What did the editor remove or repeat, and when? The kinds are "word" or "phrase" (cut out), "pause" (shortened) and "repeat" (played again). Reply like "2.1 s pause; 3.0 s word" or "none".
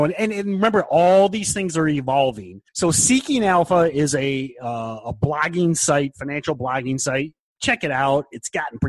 2.7 s pause